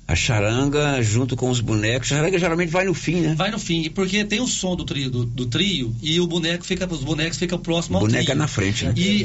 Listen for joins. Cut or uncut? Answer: uncut